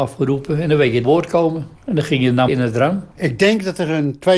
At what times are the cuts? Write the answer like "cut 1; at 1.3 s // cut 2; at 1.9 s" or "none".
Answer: cut 1; at 1.0 s // cut 2; at 1.8 s // cut 3; at 2.5 s // cut 4; at 3.1 s